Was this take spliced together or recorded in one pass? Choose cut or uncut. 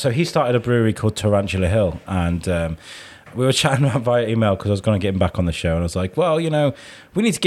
uncut